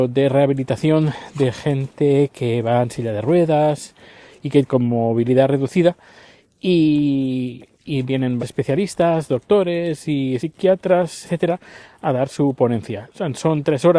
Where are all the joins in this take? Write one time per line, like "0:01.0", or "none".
0:07.7
0:08.4
0:10.4
0:11.2